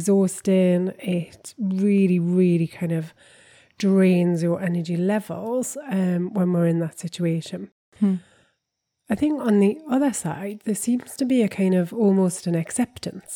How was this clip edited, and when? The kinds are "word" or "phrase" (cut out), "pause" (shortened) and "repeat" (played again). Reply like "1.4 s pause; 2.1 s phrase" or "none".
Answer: none